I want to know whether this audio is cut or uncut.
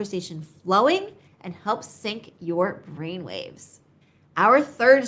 uncut